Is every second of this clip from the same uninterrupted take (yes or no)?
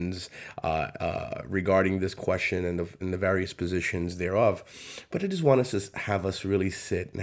yes